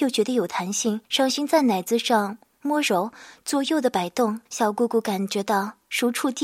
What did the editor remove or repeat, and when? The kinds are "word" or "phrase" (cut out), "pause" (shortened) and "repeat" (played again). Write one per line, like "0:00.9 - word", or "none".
0:01.0 - pause
0:04.5 - pause